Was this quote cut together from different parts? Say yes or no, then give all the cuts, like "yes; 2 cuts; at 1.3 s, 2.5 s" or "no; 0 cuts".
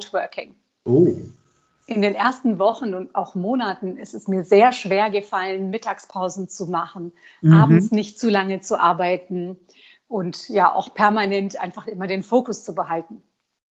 no; 0 cuts